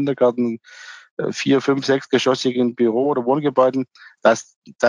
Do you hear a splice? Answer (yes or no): no